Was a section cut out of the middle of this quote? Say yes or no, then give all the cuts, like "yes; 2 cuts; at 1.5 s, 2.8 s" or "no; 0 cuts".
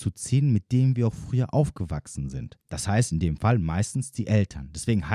yes; 1 cut; at 2.6 s